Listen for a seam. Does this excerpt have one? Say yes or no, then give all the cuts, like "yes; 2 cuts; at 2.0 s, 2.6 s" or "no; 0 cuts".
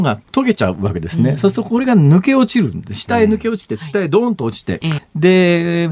yes; 1 cut; at 5.0 s